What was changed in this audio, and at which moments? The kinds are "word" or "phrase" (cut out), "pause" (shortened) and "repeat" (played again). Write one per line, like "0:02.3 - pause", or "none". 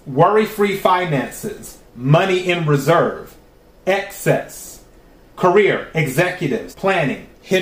0:06.7 - word